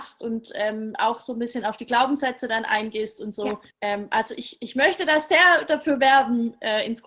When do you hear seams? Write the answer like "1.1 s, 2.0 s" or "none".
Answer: 3.7 s

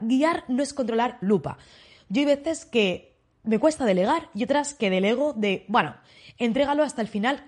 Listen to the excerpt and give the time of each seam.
1.2 s

